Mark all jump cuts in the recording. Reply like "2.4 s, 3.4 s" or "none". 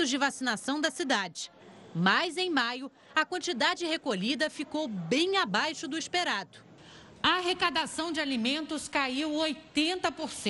none